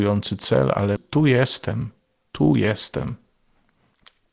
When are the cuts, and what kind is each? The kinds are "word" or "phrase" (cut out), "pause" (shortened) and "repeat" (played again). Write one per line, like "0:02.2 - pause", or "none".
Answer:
0:01.0 - word

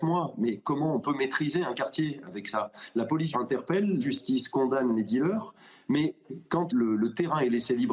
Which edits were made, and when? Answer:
0:03.3 - word
0:04.0 - word
0:06.7 - word

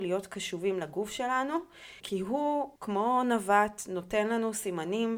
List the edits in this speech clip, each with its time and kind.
0:02.0 - word
0:02.8 - pause

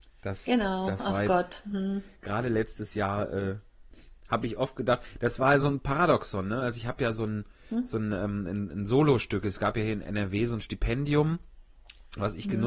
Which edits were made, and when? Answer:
none

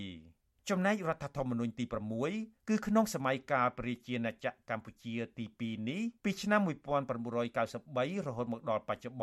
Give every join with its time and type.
0:02.6 - pause
0:06.2 - pause

